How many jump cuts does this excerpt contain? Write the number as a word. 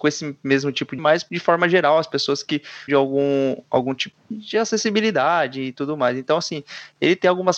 two